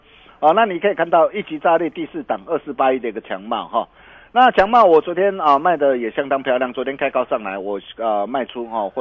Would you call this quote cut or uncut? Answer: uncut